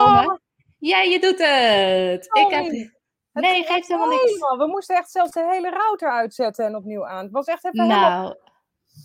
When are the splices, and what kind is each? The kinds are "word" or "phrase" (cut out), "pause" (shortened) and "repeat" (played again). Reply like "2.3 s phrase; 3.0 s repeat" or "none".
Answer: none